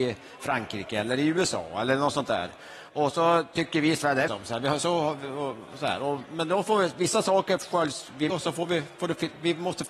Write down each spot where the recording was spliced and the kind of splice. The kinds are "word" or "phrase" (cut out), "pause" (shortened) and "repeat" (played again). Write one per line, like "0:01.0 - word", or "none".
0:04.3 - phrase
0:08.3 - phrase